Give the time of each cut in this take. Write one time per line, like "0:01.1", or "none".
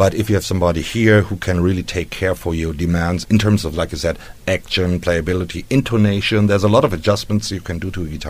0:03.2